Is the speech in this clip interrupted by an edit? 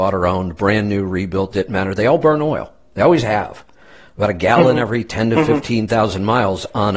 no; 0 cuts

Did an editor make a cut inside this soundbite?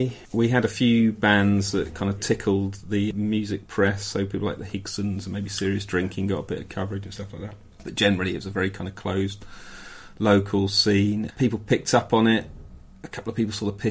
no; 0 cuts

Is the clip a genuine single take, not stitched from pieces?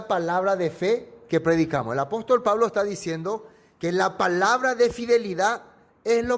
yes; 0 cuts

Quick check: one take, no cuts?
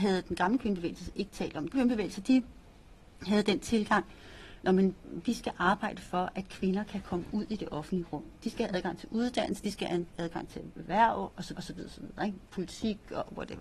no; 2 cuts; at 1.7 s, 11.6 s

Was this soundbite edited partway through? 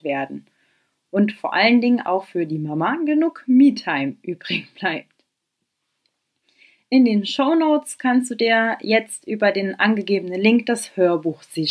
no; 0 cuts

